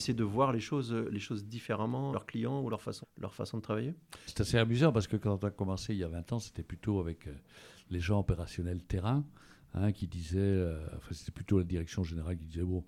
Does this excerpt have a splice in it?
yes; 3 cuts; at 2.1 s, 3.0 s, 4.3 s

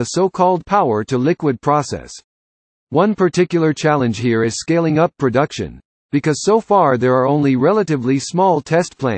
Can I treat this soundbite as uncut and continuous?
yes; 0 cuts

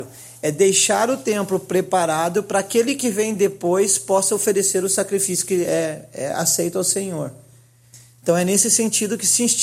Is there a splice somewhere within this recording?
no; 0 cuts

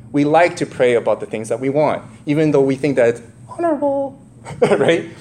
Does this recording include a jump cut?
no; 0 cuts

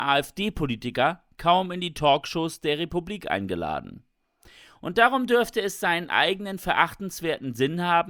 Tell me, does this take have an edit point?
no; 0 cuts

